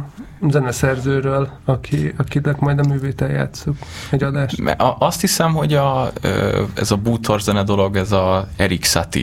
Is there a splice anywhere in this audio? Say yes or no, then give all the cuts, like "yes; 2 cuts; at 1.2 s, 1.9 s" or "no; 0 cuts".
no; 0 cuts